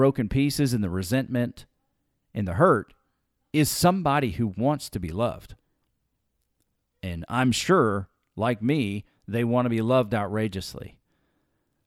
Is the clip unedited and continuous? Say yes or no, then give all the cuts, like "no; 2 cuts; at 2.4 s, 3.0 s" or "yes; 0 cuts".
yes; 0 cuts